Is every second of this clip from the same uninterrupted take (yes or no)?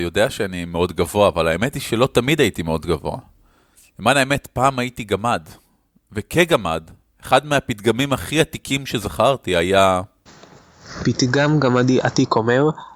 yes